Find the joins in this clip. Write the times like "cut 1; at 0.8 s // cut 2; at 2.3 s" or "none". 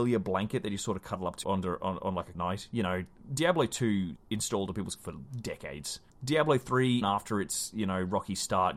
cut 1; at 1.4 s // cut 2; at 2.3 s // cut 3; at 4.2 s // cut 4; at 5.0 s // cut 5; at 6.1 s // cut 6; at 7.0 s

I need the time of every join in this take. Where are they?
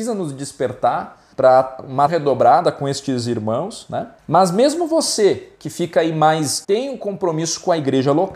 cut 1; at 1.3 s // cut 2; at 2.1 s // cut 3; at 4.2 s // cut 4; at 6.6 s

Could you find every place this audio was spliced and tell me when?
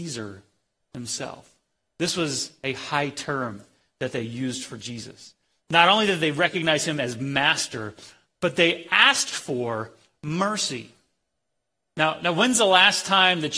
none

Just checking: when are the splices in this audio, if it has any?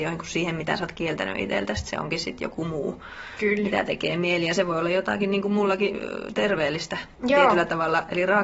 cut 1; at 7.1 s

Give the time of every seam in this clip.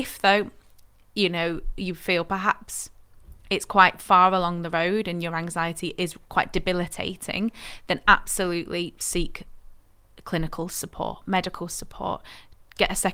none

